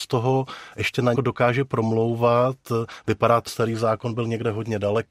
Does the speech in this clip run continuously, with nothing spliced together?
no; 2 cuts; at 1.1 s, 3.5 s

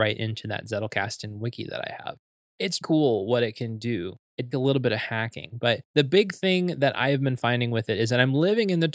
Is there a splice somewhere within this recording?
yes; 3 cuts; at 2.8 s, 4.5 s, 5.9 s

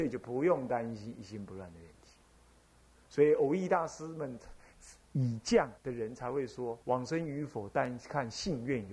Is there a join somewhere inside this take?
yes; 3 cuts; at 5.0 s, 5.8 s, 6.8 s

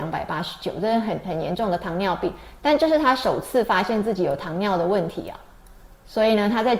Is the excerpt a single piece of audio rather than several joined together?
yes; 0 cuts

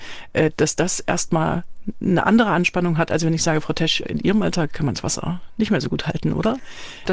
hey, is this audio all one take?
no; 1 cut; at 4.0 s

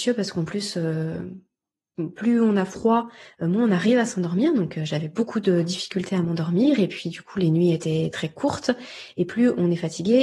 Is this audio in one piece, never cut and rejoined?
yes; 0 cuts

